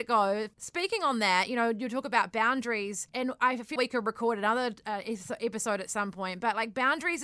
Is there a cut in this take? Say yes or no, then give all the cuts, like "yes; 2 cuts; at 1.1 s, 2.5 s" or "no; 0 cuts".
yes; 1 cut; at 3.8 s